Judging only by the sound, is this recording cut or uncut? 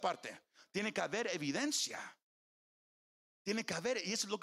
uncut